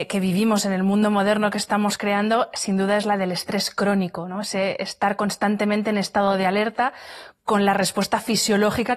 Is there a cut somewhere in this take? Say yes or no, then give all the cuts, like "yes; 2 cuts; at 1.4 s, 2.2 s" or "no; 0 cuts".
no; 0 cuts